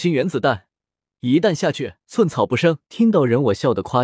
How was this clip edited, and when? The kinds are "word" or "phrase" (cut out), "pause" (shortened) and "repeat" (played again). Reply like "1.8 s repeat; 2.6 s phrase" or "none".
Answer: 2.0 s pause; 2.8 s pause